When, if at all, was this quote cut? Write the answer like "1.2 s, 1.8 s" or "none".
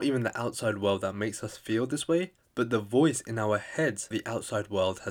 4.1 s